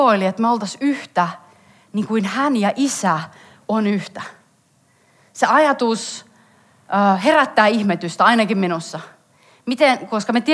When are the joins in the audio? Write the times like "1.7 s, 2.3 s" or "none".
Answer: none